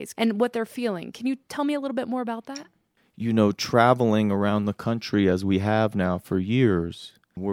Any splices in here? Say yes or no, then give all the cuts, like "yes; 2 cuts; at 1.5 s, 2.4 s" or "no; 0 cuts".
no; 0 cuts